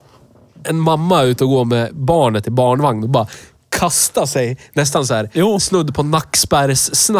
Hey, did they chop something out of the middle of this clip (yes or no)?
no